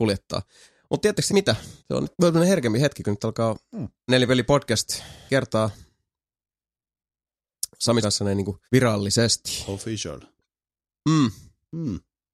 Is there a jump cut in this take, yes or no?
yes